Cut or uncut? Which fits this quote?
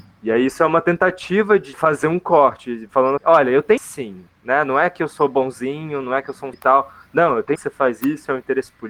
cut